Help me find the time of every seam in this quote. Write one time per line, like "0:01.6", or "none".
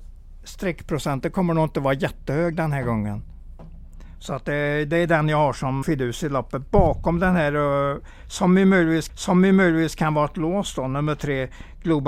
0:05.8
0:09.1